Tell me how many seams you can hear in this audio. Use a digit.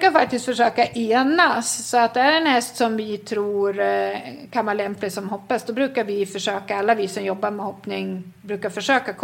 0